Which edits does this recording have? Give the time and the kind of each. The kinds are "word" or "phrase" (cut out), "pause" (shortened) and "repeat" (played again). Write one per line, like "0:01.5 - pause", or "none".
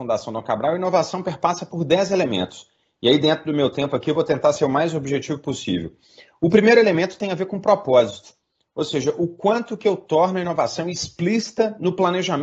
none